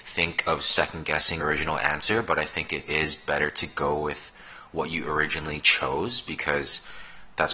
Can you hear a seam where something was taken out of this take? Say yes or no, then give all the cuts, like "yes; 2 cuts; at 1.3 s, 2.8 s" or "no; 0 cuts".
yes; 2 cuts; at 1.4 s, 2.9 s